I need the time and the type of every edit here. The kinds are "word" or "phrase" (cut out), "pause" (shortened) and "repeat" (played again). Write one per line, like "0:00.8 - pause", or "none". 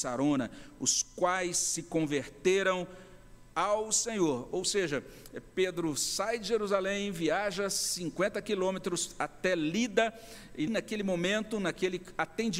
0:10.7 - word